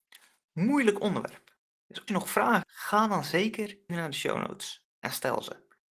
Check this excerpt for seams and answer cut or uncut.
cut